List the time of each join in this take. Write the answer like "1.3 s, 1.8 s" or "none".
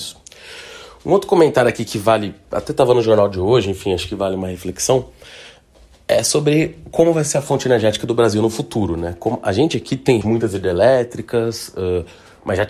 10.2 s